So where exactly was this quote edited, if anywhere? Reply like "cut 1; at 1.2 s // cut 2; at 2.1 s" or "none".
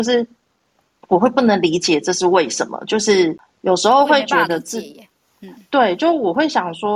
none